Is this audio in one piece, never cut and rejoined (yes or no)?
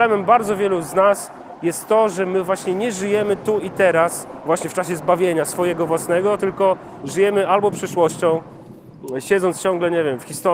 yes